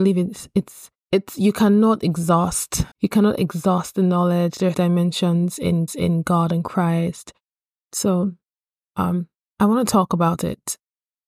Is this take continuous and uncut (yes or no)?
no